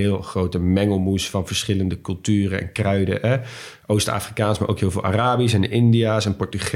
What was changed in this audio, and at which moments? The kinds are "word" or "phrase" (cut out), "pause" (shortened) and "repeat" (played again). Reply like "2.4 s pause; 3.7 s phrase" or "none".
none